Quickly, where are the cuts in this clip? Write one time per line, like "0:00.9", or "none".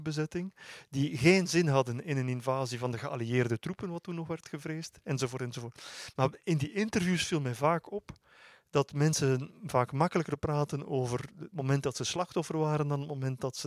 none